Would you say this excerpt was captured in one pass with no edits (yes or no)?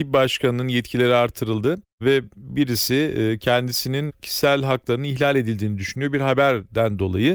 yes